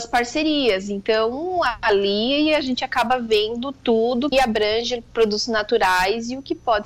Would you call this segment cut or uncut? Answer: cut